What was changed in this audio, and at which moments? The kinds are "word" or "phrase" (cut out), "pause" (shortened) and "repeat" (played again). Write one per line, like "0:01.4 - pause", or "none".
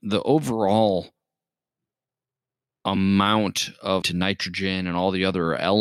0:04.0 - word